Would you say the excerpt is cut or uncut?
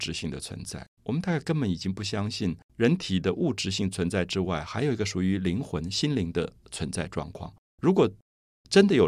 cut